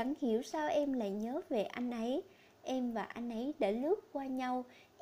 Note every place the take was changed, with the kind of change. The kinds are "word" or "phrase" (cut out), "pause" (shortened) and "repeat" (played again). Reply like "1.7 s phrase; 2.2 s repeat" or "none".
none